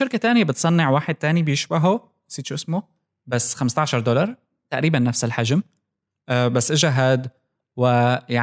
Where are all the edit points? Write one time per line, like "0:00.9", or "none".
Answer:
none